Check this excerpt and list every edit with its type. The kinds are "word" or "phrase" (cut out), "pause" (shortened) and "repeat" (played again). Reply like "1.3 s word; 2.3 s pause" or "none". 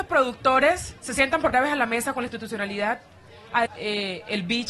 1.0 s pause; 1.5 s word; 3.7 s word